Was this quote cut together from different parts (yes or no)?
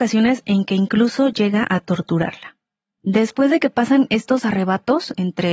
no